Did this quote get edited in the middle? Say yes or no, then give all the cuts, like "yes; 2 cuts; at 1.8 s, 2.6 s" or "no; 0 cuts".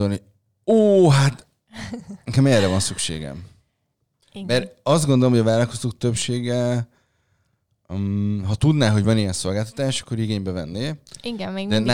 no; 0 cuts